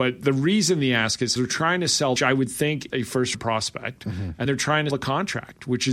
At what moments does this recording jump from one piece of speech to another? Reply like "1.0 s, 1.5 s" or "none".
1.4 s, 2.2 s, 2.9 s, 3.3 s, 4.4 s, 4.9 s